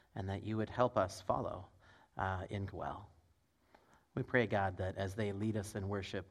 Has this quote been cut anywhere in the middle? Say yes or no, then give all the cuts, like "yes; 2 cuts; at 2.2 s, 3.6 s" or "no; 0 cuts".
yes; 1 cut; at 2.7 s